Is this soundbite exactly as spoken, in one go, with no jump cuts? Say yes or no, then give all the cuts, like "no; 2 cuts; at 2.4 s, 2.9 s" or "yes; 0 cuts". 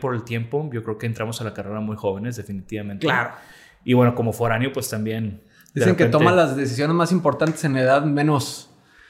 yes; 0 cuts